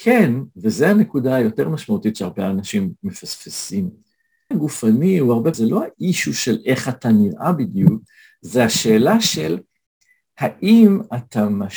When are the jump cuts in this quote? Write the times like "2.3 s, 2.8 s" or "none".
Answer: 4.5 s, 5.5 s